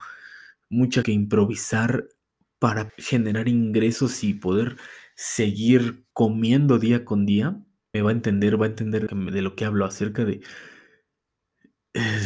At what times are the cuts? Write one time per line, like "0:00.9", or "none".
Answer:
0:01.0
0:02.9
0:06.1
0:07.9
0:09.1